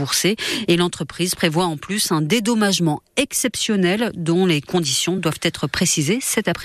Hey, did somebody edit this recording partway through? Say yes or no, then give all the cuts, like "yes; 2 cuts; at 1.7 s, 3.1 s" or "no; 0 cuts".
no; 0 cuts